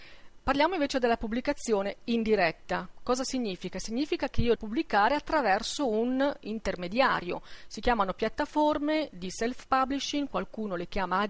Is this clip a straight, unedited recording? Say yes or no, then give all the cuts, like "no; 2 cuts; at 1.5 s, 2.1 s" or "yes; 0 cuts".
no; 1 cut; at 4.6 s